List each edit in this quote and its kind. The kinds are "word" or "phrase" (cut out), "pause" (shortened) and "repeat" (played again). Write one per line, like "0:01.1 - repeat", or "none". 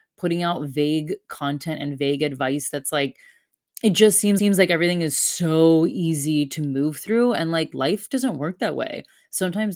0:04.4 - repeat